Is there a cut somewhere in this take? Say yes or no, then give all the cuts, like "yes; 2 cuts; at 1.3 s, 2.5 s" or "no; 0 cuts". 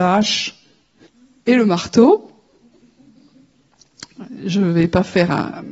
yes; 1 cut; at 1.1 s